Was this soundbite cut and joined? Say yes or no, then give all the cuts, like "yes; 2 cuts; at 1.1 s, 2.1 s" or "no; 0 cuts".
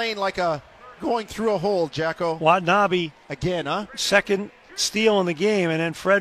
yes; 1 cut; at 1.0 s